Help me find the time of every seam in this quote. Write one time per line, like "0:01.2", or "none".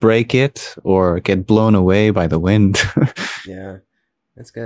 none